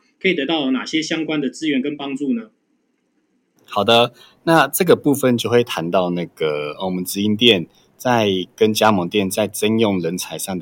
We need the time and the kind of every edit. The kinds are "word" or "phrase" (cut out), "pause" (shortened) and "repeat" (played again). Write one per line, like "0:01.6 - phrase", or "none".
none